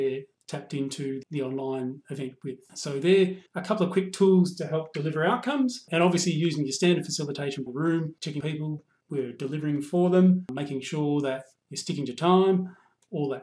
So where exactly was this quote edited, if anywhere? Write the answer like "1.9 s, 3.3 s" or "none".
1.2 s, 3.5 s, 7.7 s, 8.4 s, 9.0 s